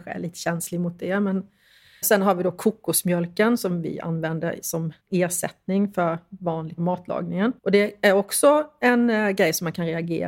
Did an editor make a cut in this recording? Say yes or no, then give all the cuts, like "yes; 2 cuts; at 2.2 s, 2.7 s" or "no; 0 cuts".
yes; 4 cuts; at 2.0 s, 5.0 s, 6.8 s, 7.6 s